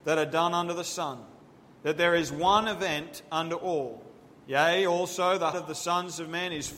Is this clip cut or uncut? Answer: cut